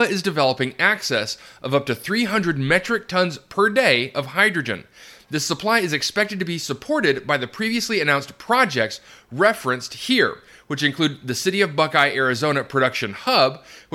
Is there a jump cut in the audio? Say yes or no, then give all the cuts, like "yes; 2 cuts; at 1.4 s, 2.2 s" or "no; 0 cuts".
no; 0 cuts